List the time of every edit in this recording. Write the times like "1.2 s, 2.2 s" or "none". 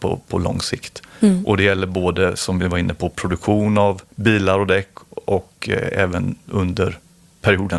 4.1 s